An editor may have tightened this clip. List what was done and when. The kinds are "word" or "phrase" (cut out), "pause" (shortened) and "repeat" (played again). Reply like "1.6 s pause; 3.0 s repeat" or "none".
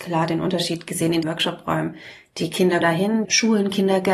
1.2 s word; 2.8 s word; 3.2 s word